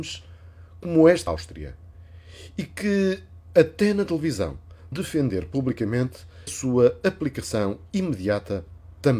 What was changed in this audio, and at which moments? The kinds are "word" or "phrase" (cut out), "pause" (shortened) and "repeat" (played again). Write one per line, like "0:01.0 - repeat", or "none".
0:01.3 - word
0:04.9 - word
0:06.5 - word